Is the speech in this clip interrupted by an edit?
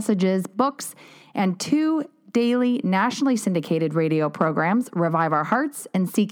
no; 0 cuts

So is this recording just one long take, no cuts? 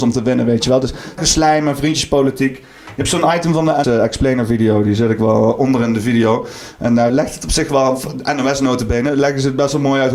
no; 3 cuts; at 1.2 s, 3.8 s, 7.1 s

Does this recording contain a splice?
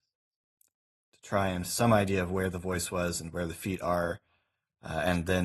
yes; 1 cut; at 1.6 s

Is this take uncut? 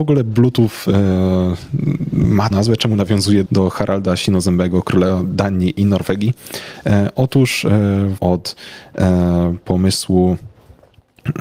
no; 3 cuts; at 2.5 s, 3.5 s, 8.2 s

